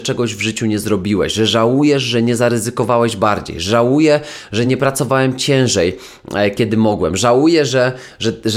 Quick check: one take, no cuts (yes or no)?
yes